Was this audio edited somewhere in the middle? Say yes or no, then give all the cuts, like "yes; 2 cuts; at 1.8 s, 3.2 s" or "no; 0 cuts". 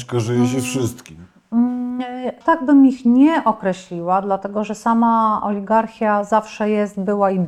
yes; 1 cut; at 2.4 s